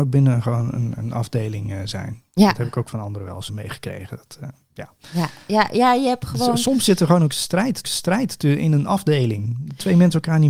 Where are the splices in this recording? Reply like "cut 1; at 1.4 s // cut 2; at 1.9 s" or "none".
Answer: cut 1; at 3.5 s // cut 2; at 7.8 s